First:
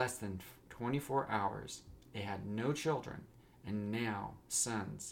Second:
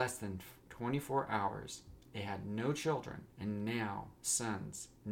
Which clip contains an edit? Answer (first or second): second